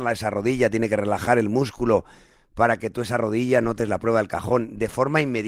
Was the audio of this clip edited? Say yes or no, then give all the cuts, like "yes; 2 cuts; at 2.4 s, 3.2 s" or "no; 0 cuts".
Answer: no; 0 cuts